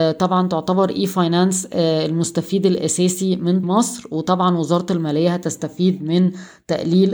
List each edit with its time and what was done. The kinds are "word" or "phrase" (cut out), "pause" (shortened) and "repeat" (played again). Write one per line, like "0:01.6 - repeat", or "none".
0:03.6 - phrase